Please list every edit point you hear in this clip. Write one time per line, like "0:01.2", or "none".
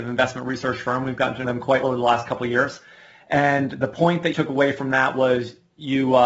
0:01.4
0:01.8
0:04.3